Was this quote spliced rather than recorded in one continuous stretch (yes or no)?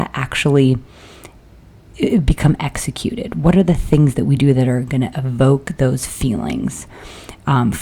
no